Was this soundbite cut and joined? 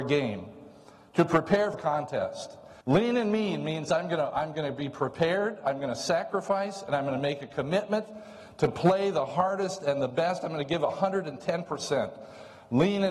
yes; 2 cuts; at 1.7 s, 2.8 s

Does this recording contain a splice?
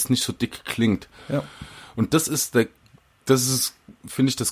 no; 0 cuts

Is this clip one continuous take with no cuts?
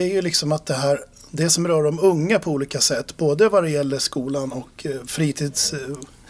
yes; 0 cuts

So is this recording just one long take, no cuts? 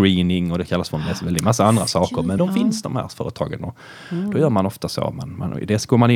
no; 1 cut; at 2.4 s

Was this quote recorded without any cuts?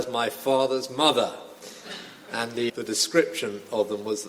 no; 1 cut; at 2.7 s

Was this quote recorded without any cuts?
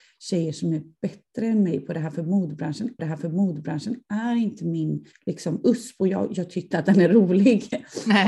no; 3 cuts; at 3.0 s, 5.1 s, 6.7 s

